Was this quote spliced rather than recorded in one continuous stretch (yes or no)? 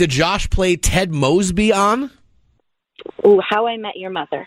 no